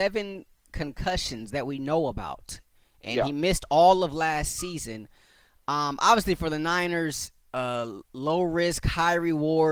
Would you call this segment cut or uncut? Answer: cut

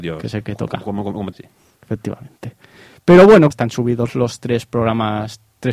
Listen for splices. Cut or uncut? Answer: cut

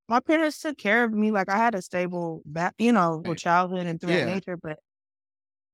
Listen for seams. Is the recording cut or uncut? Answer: cut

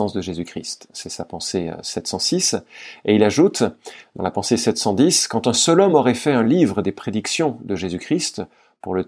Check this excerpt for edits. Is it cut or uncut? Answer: uncut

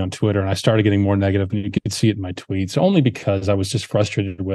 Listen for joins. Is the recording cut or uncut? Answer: cut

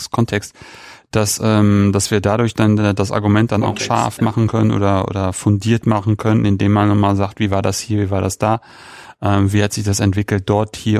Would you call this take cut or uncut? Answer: uncut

